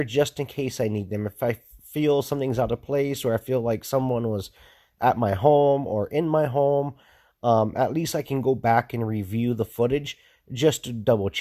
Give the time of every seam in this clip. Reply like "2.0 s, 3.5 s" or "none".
none